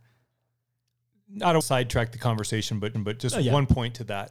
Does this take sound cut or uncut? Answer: cut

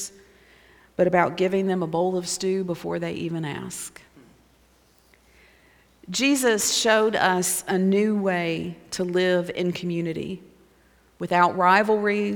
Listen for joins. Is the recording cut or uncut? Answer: uncut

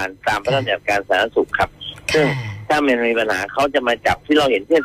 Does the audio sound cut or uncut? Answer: uncut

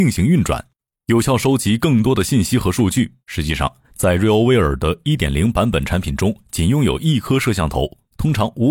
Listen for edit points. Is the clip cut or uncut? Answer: cut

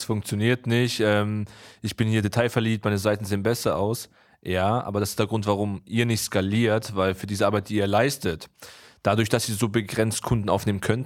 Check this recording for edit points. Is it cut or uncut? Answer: uncut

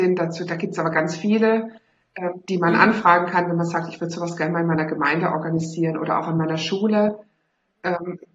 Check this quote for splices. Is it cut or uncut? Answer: uncut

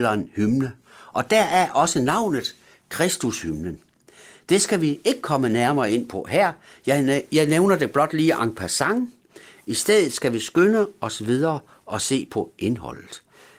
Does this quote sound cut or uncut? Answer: uncut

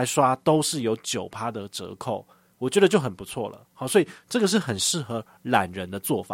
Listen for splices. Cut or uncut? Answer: uncut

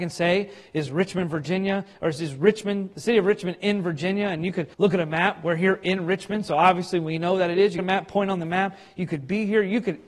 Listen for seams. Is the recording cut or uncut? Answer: cut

